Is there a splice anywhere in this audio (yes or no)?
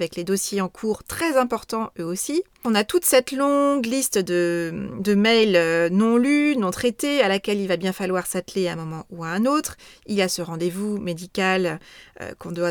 no